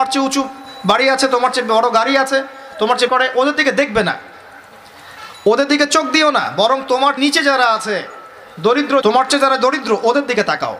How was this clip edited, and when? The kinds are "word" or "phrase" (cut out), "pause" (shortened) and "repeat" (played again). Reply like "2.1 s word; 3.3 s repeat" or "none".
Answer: 3.1 s phrase; 7.2 s word; 9.0 s word

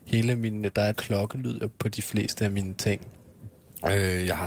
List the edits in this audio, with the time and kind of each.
0.9 s word; 1.7 s word

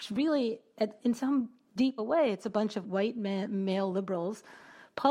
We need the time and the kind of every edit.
1.0 s word; 2.0 s word; 2.8 s word

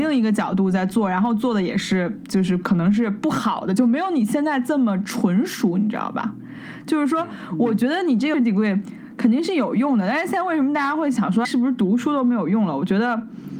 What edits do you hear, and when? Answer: 8.3 s word; 11.4 s word

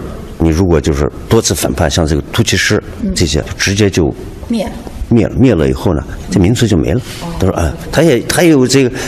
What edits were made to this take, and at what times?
3.4 s word; 6.2 s phrase; 7.8 s word

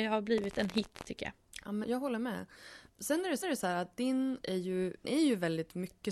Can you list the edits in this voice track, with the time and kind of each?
1.8 s word; 2.9 s pause; 3.4 s repeat; 4.4 s word; 5.0 s word

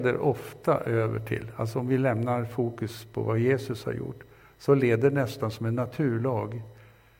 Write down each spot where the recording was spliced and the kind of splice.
none

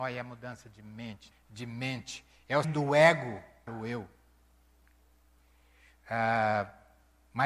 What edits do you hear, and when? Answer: 1.3 s word; 2.6 s word; 3.7 s word

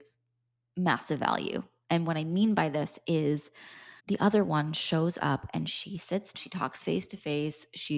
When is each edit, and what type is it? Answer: 4.0 s pause; 6.3 s word

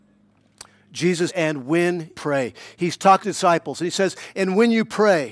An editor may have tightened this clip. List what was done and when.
1.3 s word; 2.1 s word; 3.2 s word

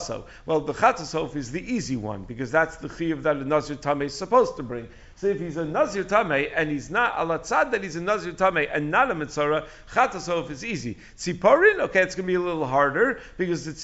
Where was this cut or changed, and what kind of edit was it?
none

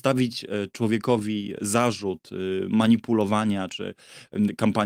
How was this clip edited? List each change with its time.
none

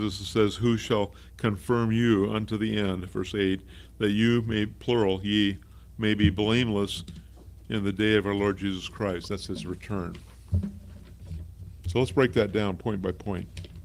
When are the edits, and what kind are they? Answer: none

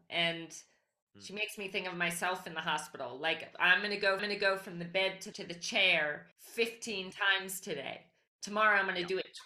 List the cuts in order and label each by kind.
4.2 s repeat; 5.3 s word; 6.3 s pause

